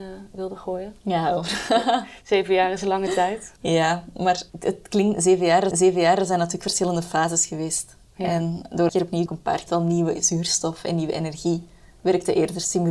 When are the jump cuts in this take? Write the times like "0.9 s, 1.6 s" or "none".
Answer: 1.0 s, 3.6 s, 4.5 s, 5.7 s, 8.9 s, 9.3 s, 9.7 s